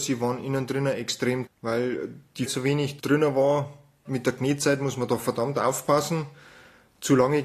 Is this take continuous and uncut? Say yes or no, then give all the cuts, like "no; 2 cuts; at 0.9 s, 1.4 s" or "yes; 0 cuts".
no; 2 cuts; at 1.5 s, 2.5 s